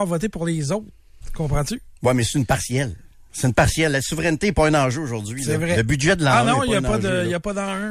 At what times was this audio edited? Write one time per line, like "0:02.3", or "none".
none